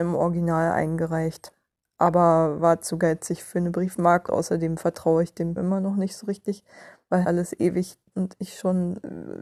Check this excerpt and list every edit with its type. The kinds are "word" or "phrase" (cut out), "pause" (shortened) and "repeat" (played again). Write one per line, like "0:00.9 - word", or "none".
0:04.3 - word
0:05.6 - word
0:07.2 - word
0:08.1 - word